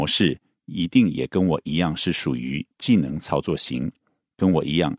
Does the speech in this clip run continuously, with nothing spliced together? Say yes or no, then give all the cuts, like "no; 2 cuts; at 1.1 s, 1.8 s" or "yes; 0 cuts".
yes; 0 cuts